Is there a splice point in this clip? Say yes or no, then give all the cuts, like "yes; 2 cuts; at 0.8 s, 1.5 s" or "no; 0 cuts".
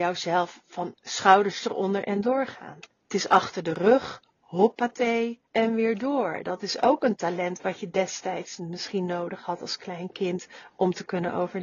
yes; 2 cuts; at 2.9 s, 5.5 s